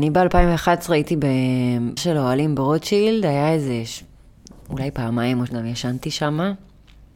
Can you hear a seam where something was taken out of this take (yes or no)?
yes